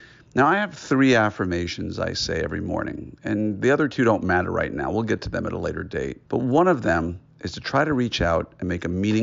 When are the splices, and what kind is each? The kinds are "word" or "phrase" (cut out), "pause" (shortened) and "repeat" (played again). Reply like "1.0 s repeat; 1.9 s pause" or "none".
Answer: 6.3 s pause